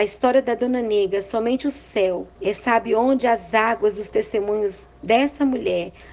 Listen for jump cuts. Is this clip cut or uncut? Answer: cut